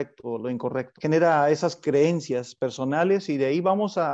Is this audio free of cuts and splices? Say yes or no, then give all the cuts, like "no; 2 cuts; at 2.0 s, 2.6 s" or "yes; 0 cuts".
yes; 0 cuts